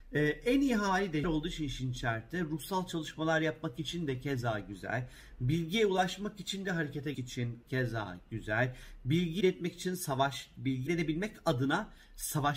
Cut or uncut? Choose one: cut